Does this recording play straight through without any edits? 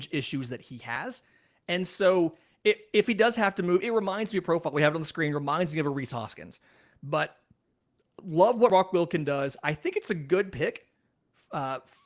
yes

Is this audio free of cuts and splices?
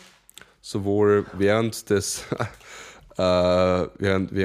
yes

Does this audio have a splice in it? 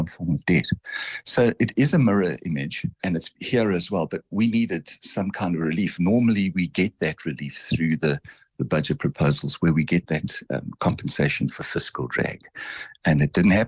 yes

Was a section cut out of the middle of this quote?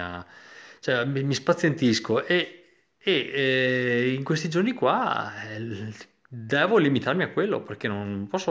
no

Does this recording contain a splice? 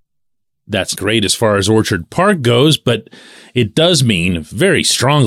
yes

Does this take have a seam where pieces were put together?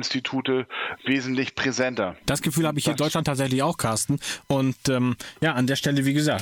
yes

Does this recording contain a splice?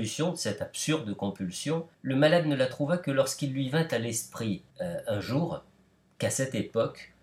yes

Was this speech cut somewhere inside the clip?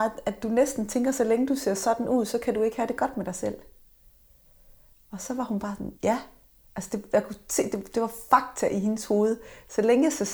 yes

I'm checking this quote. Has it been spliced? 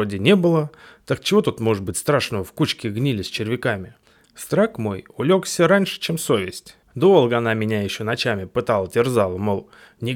yes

